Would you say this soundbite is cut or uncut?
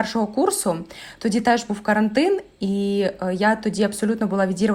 uncut